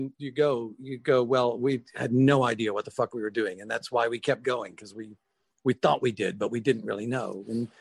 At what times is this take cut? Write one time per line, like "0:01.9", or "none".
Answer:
none